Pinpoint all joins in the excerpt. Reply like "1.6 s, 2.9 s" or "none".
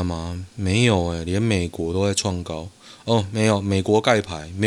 none